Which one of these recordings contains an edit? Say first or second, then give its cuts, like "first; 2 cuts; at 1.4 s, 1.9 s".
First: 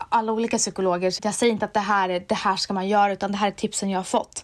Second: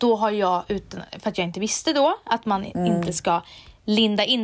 first; 1 cut; at 1.2 s